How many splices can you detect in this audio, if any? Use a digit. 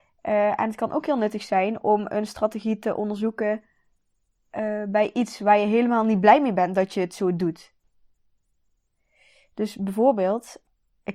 0